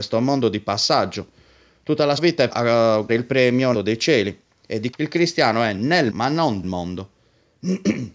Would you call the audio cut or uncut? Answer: cut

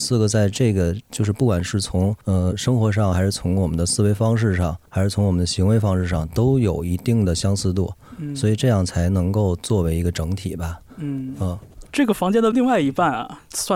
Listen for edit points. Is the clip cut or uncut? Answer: cut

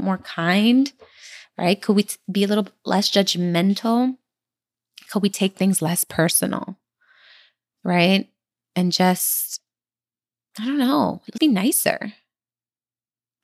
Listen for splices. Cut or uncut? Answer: cut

